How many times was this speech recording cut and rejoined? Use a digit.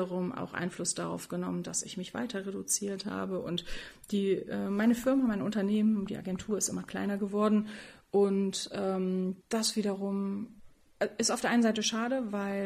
1